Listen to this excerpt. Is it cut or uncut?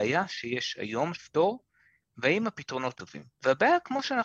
cut